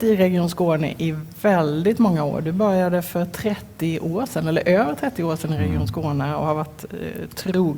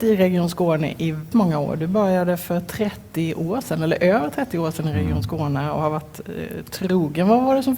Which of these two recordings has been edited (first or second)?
second